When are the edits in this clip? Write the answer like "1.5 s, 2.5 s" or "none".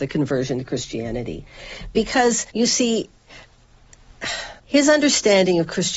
2.5 s, 4.6 s

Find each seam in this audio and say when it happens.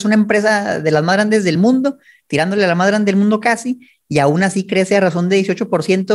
none

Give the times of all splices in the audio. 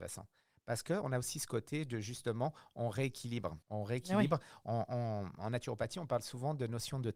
3.6 s

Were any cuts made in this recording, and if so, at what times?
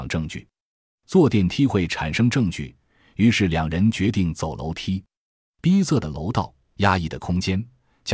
none

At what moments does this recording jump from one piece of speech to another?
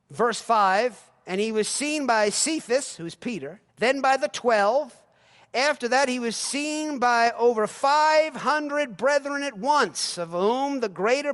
3.7 s

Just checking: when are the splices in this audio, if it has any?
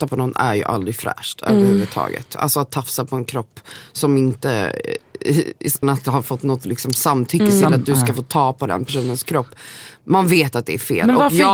5.8 s

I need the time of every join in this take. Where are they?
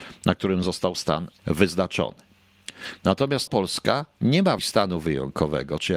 1.4 s, 3.5 s, 4.6 s

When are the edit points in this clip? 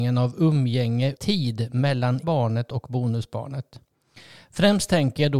1.1 s, 2.2 s

